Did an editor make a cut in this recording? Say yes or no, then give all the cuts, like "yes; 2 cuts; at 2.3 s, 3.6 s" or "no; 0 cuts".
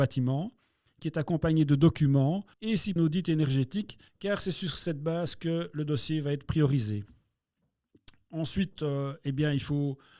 yes; 3 cuts; at 2.5 s, 3.0 s, 4.1 s